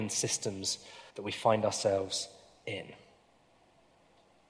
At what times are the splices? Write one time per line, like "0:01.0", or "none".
0:01.1